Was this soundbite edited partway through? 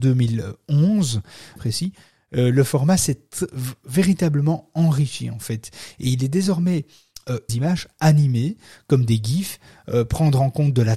yes; 2 cuts; at 1.6 s, 7.5 s

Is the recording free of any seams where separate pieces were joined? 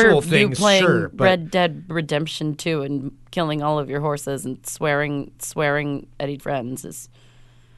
no; 2 cuts; at 5.4 s, 6.4 s

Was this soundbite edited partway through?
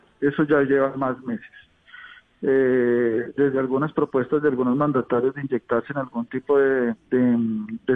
yes; 1 cut; at 7.0 s

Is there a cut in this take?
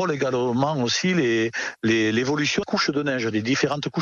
yes; 1 cut; at 2.6 s

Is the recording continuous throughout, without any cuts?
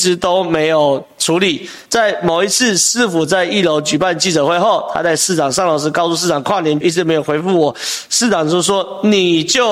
no; 2 cuts; at 1.9 s, 6.8 s

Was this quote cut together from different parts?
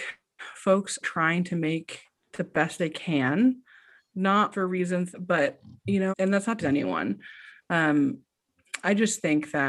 yes; 8 cuts; at 1.0 s, 2.1 s, 2.8 s, 4.5 s, 5.1 s, 5.8 s, 6.1 s, 6.6 s

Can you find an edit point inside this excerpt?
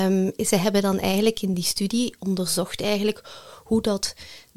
no; 0 cuts

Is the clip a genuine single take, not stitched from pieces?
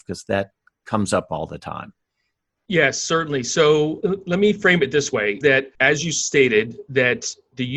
no; 3 cuts; at 4.0 s, 5.4 s, 5.7 s

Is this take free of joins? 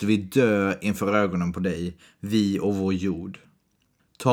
yes; 0 cuts

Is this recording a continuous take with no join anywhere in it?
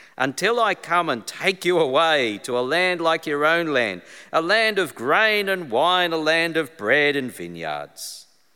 yes; 0 cuts

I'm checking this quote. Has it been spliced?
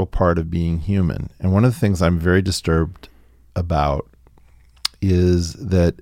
no; 0 cuts

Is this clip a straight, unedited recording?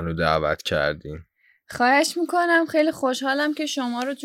yes; 0 cuts

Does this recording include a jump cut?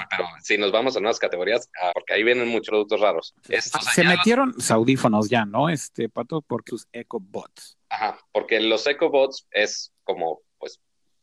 yes; 8 cuts; at 1.9 s, 2.7 s, 3.4 s, 3.7 s, 4.7 s, 6.7 s, 7.8 s, 9.5 s

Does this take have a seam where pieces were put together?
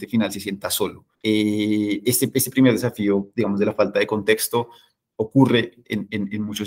yes; 1 cut; at 1.1 s

